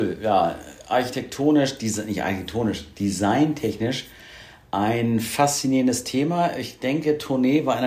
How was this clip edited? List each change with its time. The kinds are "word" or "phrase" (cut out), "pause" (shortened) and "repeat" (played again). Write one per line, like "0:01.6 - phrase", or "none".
none